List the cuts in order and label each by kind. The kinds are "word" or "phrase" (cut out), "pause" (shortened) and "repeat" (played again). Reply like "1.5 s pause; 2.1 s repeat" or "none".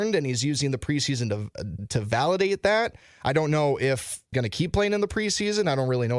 1.8 s word; 4.3 s word